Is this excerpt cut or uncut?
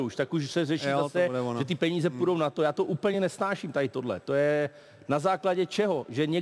uncut